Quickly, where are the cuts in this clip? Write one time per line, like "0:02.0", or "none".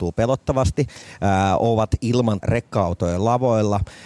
0:02.4